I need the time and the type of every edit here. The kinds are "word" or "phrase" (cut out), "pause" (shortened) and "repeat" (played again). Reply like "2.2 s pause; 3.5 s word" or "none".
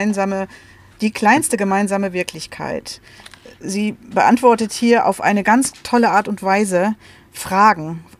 none